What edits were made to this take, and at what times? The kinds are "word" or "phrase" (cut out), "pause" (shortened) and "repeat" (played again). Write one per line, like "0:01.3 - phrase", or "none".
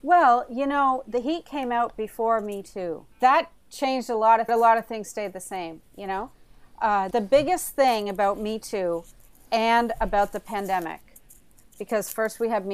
0:03.1 - pause
0:04.5 - phrase
0:07.1 - word